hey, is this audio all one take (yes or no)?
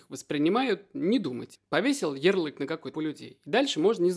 no